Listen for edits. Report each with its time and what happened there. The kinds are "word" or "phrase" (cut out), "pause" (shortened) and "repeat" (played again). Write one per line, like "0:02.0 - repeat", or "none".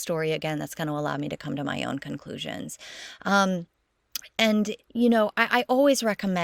0:04.8 - pause